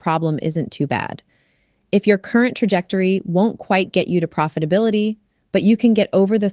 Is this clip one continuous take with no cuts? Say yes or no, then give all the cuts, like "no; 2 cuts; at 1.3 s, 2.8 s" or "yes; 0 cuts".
yes; 0 cuts